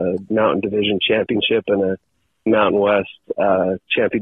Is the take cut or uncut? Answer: uncut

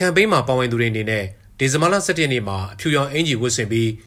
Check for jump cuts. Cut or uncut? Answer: uncut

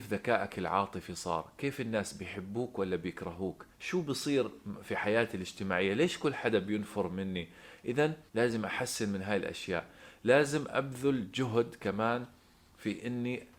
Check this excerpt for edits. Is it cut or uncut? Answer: cut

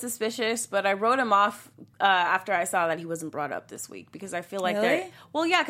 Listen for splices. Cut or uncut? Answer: cut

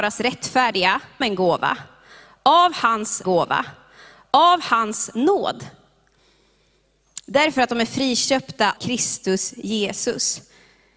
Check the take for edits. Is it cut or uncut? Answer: cut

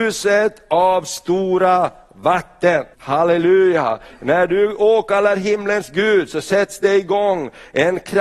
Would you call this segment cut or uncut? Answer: cut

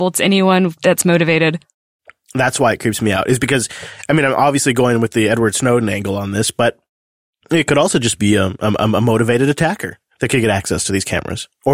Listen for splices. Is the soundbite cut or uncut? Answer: uncut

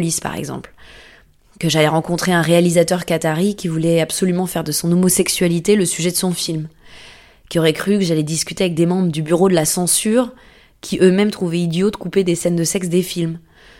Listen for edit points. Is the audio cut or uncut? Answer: uncut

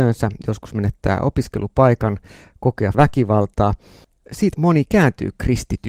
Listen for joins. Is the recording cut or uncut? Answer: cut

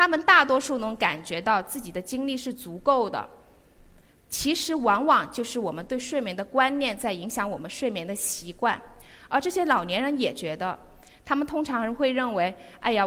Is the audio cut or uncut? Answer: uncut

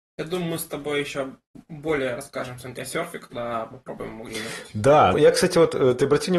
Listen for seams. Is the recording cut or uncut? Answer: cut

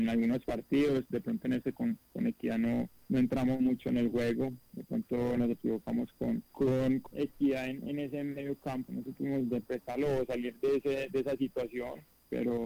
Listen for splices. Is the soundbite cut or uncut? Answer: cut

